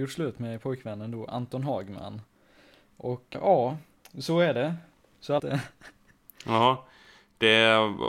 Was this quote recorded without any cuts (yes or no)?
no